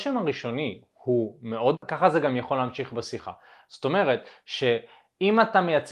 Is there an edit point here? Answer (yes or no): yes